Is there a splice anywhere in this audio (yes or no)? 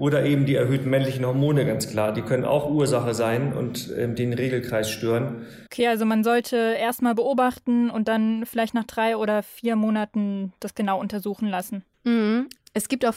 yes